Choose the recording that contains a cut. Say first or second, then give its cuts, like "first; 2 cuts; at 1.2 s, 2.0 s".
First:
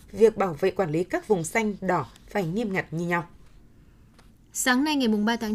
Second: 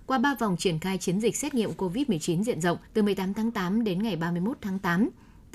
second; 1 cut; at 2.9 s